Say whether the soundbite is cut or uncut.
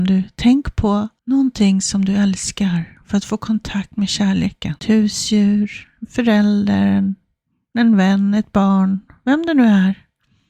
cut